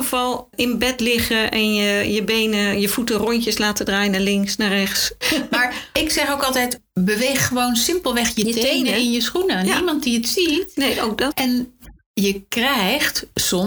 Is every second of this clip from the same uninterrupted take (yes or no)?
yes